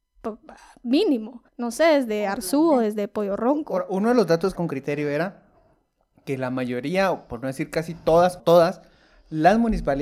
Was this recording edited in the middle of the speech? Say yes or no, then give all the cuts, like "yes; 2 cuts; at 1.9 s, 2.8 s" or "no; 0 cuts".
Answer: yes; 3 cuts; at 1.5 s, 4.6 s, 8.4 s